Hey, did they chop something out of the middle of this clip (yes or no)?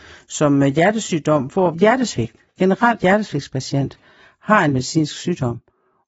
yes